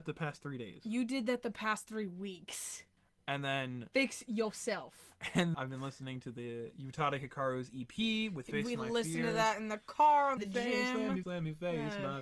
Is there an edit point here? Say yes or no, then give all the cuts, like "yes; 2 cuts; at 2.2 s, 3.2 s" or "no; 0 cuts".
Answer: yes; 4 cuts; at 3.0 s, 5.5 s, 10.4 s, 11.2 s